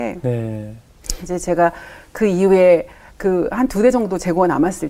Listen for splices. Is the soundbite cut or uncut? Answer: uncut